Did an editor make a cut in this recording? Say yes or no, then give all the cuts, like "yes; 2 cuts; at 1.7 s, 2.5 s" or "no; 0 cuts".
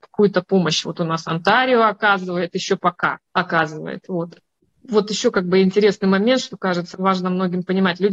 yes; 1 cut; at 3.3 s